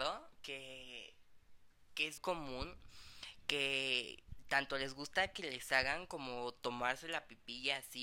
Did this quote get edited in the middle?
yes; 1 cut; at 2.2 s

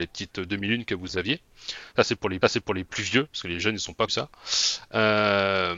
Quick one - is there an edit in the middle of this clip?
yes; 2 cuts; at 2.4 s, 4.1 s

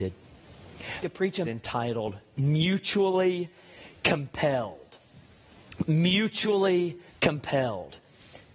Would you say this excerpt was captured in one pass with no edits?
no; 3 cuts; at 1.0 s, 1.4 s, 7.1 s

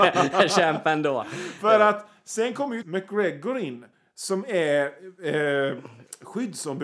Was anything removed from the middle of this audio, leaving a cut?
yes; 2 cuts; at 2.8 s, 3.9 s

